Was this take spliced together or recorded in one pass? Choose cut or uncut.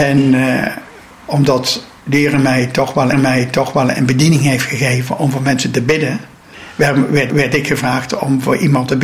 cut